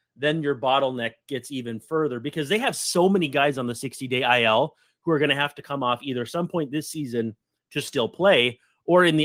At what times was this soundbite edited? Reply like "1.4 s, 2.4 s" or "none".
none